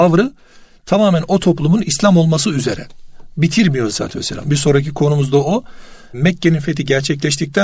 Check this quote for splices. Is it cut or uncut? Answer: cut